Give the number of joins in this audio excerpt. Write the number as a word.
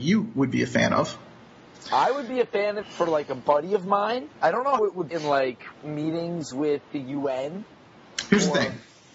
five